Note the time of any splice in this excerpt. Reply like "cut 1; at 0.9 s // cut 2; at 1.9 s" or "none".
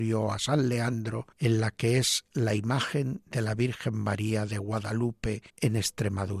cut 1; at 1.3 s // cut 2; at 5.5 s